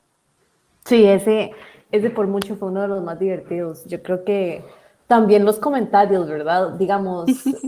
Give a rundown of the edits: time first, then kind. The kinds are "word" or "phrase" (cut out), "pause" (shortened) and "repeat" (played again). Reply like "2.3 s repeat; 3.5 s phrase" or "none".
none